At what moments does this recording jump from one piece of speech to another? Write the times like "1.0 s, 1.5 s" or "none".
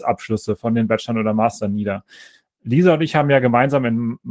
none